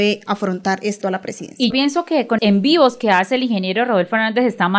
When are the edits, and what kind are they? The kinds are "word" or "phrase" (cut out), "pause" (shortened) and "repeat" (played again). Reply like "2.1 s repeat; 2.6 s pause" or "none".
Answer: 1.0 s word; 1.7 s word; 2.4 s word